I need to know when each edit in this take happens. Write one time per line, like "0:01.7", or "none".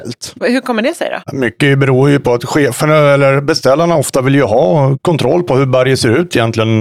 none

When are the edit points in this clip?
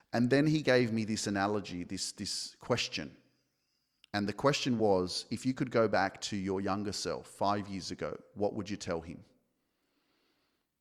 none

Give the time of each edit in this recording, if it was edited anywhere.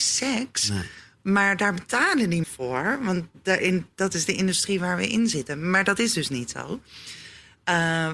0:02.4

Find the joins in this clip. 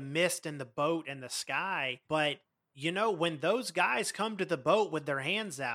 0:02.0

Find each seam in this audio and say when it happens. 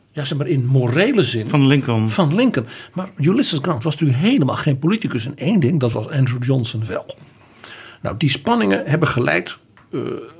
none

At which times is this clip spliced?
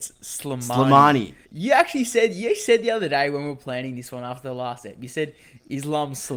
0:01.4

